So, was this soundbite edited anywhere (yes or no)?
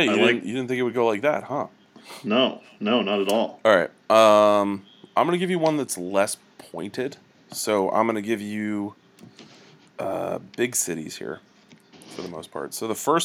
no